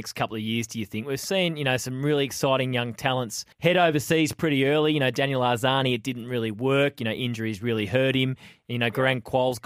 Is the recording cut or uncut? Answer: cut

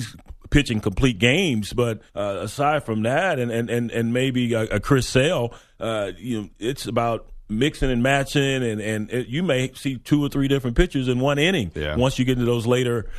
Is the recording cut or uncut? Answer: cut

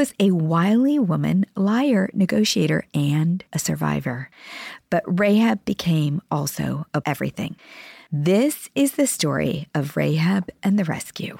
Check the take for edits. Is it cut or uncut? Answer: cut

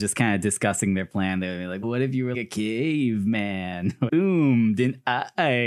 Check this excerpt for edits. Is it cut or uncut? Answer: cut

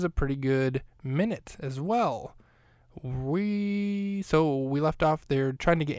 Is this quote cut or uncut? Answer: uncut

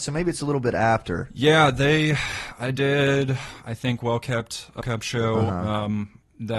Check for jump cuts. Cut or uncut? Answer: cut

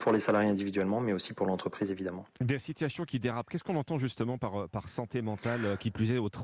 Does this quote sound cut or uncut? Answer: uncut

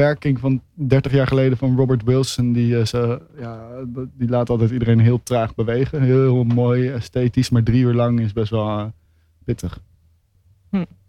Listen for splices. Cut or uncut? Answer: uncut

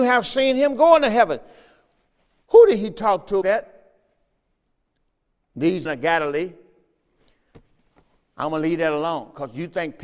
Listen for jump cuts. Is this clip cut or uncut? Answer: cut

